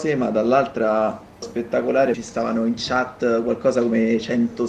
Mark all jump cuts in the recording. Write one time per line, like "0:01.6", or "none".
0:01.4
0:02.1